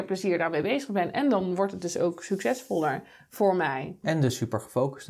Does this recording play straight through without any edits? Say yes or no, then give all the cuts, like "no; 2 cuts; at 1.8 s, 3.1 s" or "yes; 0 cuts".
yes; 0 cuts